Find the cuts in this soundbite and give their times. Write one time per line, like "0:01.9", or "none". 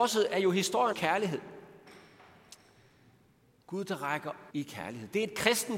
0:00.9
0:04.5